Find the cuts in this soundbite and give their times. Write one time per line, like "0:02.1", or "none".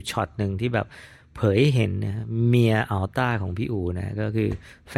none

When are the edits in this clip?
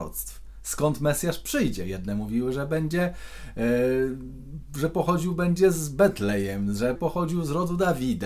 0:07.0

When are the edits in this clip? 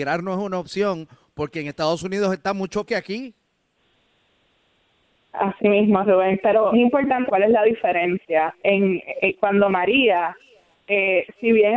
0:02.9
0:06.7
0:07.3

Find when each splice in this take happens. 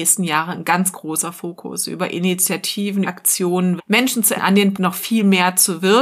0:00.9
0:03.0
0:03.8
0:04.3
0:04.7

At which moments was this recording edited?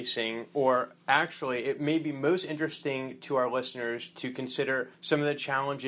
0:04.9

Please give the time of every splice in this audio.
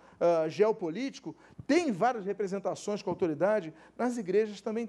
none

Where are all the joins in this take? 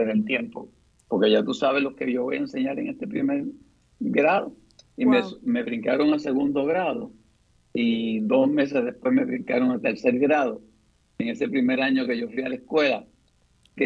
none

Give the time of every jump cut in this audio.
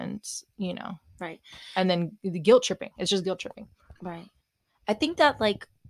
none

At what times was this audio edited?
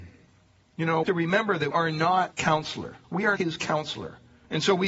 0:01.0
0:01.7
0:02.3
0:03.0
0:03.4

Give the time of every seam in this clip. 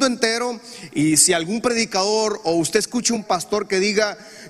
0:03.2

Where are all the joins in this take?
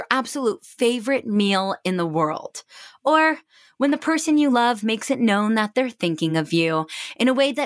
none

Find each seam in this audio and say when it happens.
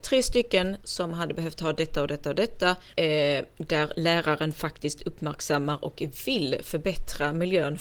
0:02.9

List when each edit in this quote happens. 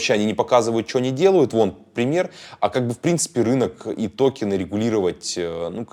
none

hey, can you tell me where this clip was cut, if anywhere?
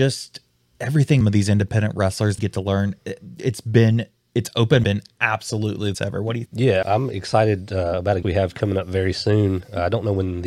0:01.2
0:02.4
0:04.8
0:05.9
0:06.5
0:06.8
0:08.2

